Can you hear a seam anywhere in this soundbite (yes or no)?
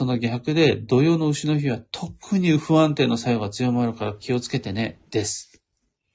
yes